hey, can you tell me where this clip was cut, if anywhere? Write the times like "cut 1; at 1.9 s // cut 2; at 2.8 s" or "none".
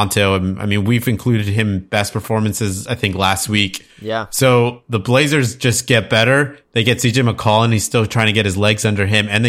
cut 1; at 3.9 s